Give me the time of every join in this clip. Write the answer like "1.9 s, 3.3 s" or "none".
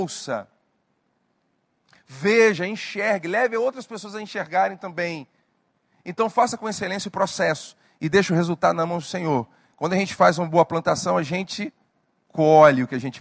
none